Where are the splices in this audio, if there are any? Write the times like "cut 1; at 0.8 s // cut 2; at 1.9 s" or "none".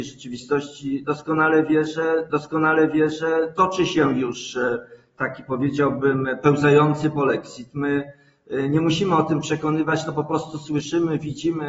cut 1; at 2.3 s